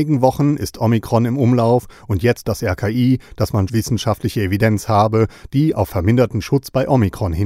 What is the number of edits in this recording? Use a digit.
3